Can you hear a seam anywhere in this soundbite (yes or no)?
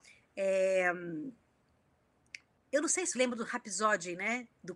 yes